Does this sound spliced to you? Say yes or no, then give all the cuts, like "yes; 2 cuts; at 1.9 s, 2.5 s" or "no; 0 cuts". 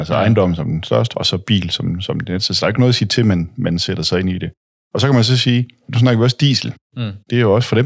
no; 0 cuts